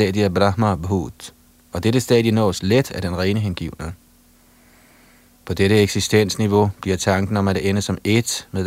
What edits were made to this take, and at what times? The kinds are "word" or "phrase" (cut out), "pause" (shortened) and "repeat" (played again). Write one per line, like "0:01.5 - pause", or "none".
none